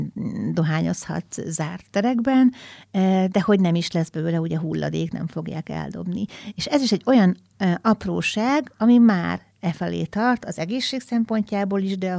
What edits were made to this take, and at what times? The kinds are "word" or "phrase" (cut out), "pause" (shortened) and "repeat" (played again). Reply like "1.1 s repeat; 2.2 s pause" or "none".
none